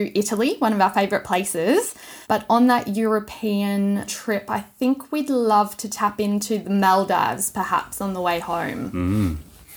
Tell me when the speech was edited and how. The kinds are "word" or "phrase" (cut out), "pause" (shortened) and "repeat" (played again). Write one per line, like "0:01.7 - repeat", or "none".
0:02.2 - pause
0:04.1 - word